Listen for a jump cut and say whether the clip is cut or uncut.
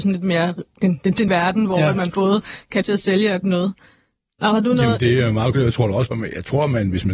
cut